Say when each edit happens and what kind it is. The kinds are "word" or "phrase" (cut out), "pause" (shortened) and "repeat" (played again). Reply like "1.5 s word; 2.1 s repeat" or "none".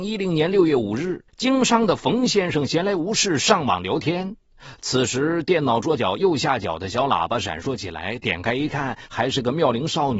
1.3 s pause

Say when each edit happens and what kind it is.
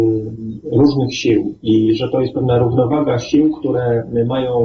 none

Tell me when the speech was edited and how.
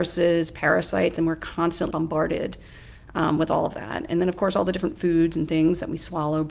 1.9 s phrase

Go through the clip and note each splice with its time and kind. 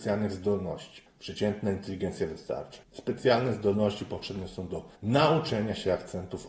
1.1 s pause; 2.8 s pause; 5.0 s pause

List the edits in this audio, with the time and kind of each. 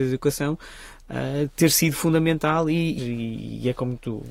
3.0 s phrase

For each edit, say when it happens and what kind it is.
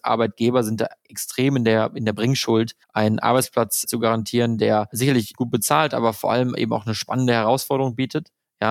2.8 s pause; 3.8 s word

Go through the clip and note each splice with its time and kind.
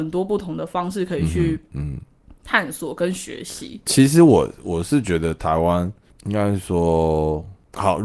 none

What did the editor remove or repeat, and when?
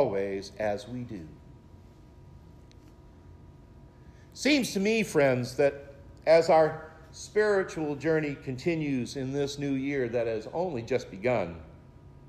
none

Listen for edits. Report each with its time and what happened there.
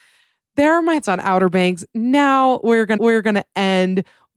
1.0 s word; 3.0 s repeat

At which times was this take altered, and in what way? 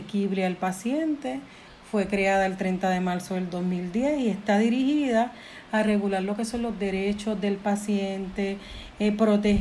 none

